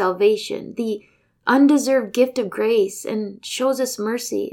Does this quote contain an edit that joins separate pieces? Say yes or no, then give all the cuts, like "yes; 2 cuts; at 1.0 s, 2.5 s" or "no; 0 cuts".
no; 0 cuts